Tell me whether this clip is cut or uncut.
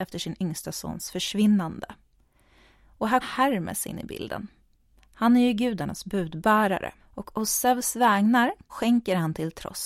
cut